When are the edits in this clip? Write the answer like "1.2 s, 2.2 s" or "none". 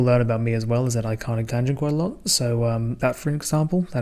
1.5 s, 3.0 s